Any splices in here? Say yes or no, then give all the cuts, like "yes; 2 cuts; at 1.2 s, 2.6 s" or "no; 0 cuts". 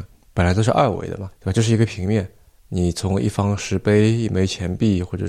yes; 1 cut; at 1.3 s